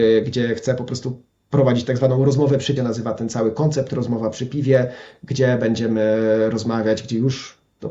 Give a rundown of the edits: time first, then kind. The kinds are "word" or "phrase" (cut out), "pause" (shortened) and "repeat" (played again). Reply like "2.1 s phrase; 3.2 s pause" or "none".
2.8 s phrase